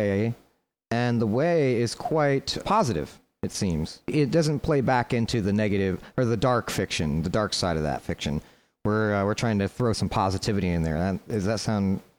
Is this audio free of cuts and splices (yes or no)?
yes